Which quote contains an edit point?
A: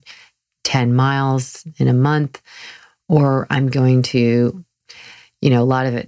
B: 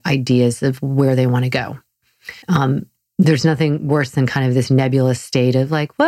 B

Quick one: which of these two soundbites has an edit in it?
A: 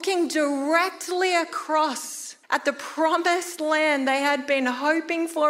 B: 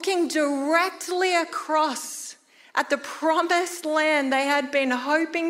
A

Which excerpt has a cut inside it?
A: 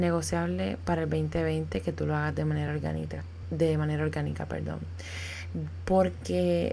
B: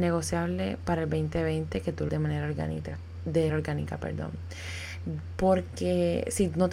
B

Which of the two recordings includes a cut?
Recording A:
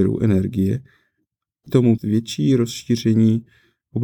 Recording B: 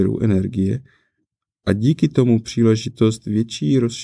A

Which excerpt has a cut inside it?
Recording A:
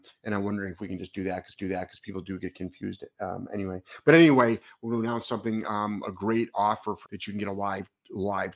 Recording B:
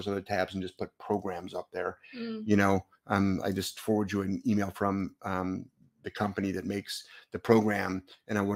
A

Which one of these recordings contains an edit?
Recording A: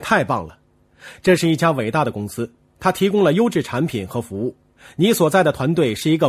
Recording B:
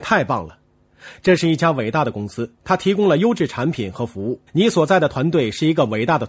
B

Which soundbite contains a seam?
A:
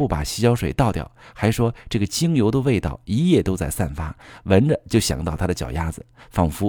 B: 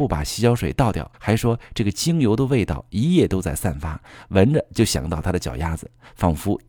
B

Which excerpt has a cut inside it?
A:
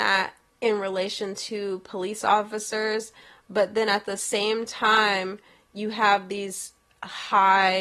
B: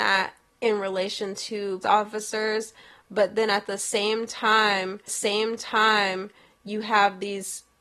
B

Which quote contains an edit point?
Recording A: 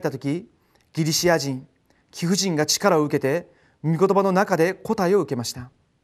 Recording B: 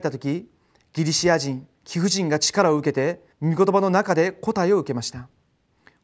B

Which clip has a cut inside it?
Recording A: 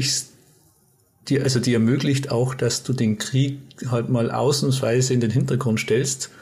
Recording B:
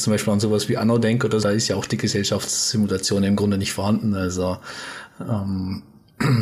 B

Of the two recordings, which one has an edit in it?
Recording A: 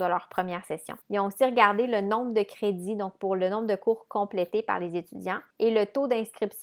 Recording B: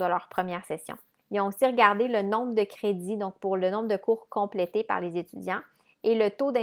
A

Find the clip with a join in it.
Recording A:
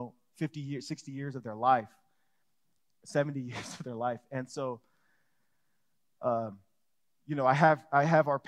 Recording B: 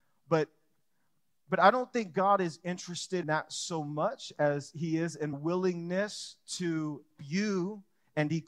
B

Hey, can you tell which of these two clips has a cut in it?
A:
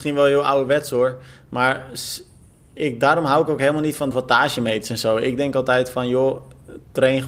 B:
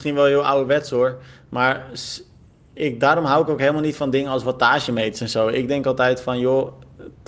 A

